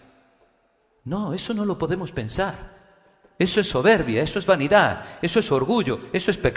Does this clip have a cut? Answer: no; 0 cuts

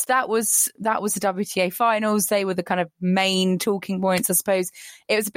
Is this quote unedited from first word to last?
yes; 0 cuts

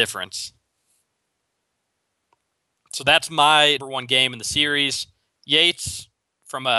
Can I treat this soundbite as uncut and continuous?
no; 1 cut; at 3.8 s

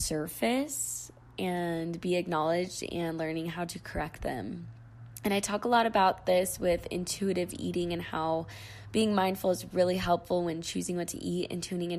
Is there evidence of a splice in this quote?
no; 0 cuts

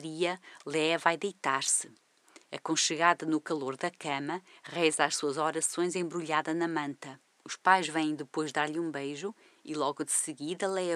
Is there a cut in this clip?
no; 0 cuts

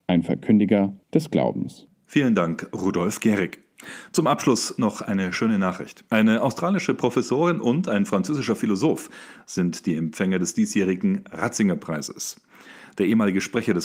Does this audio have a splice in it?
yes; 2 cuts; at 1.0 s, 6.1 s

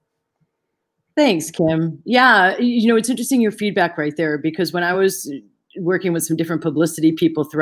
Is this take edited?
no; 0 cuts

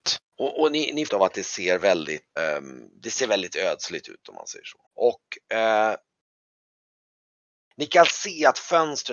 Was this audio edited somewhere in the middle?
yes; 3 cuts; at 1.1 s, 2.4 s, 4.8 s

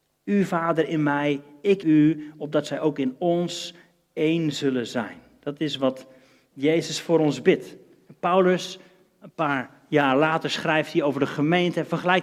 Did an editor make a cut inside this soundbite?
yes; 1 cut; at 1.8 s

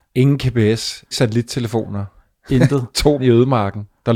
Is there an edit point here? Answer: yes; 2 cuts; at 1.1 s, 3.2 s

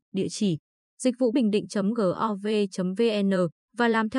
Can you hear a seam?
yes; 1 cut; at 1.3 s

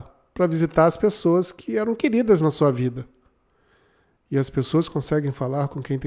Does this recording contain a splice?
no; 0 cuts

